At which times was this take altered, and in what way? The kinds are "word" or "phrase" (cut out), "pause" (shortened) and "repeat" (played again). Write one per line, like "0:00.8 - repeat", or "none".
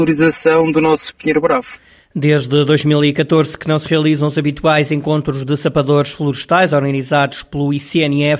none

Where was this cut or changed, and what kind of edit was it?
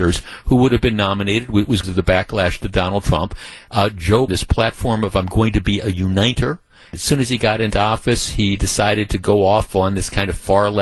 0:01.8 - phrase
0:04.3 - phrase
0:06.9 - word

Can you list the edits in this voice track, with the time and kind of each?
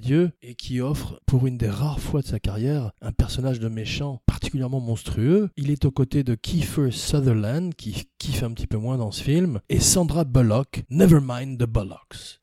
none

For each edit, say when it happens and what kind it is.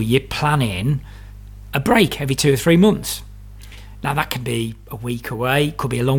none

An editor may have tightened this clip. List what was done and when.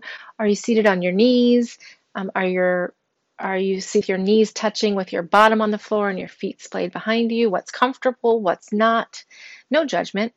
0:04.0 - word

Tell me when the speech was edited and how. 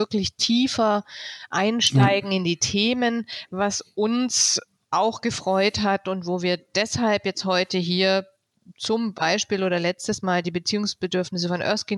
none

